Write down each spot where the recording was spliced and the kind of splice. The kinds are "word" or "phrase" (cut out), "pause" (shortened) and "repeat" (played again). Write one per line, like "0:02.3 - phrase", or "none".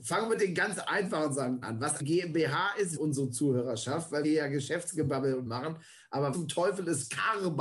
0:01.6 - word
0:02.0 - word
0:03.0 - word
0:04.2 - word
0:05.5 - word
0:06.3 - word